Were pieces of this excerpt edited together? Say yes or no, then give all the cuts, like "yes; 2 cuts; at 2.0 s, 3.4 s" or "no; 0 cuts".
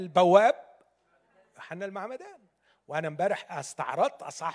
no; 0 cuts